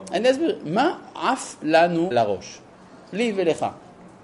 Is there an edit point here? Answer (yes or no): yes